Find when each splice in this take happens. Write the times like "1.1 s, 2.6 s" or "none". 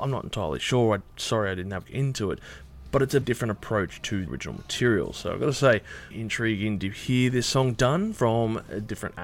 1.8 s, 3.2 s, 4.3 s, 6.1 s